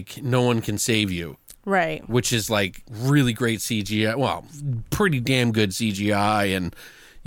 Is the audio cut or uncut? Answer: uncut